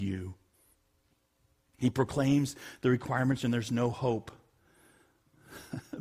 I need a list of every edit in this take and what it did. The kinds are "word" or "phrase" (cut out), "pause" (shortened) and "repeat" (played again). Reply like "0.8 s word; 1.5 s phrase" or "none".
3.4 s phrase